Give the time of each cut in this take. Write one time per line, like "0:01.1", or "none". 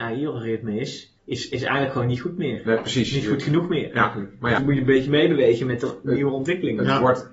0:01.2
0:04.6